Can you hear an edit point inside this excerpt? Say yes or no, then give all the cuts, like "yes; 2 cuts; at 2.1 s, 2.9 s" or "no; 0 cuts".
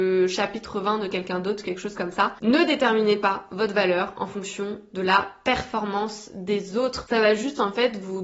no; 0 cuts